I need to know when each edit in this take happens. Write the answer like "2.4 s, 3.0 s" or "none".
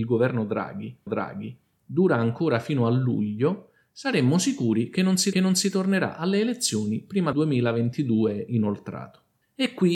1.1 s, 5.3 s, 7.3 s

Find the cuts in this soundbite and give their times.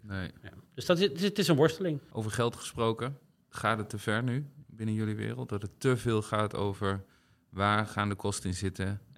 3.4 s

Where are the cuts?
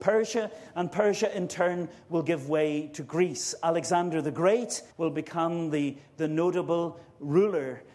4.9 s

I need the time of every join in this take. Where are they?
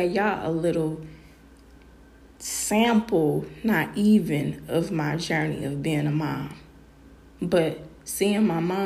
none

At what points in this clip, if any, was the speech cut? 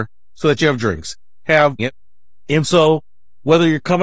1.8 s

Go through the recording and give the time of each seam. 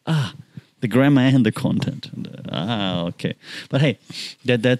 none

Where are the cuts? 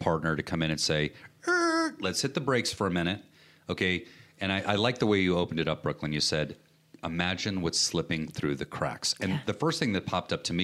none

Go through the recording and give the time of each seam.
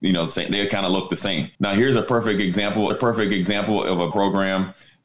1.5 s, 2.9 s, 4.1 s

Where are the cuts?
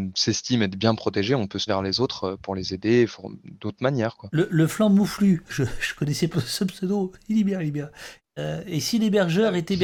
1.7 s, 4.5 s, 6.3 s

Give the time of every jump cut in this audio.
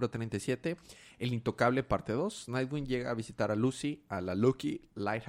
none

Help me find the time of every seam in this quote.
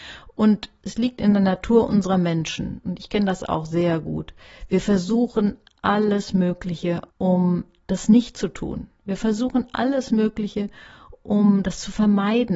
7.1 s

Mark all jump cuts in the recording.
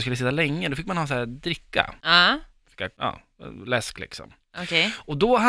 none

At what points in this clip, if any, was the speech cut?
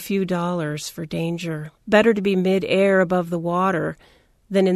1.8 s

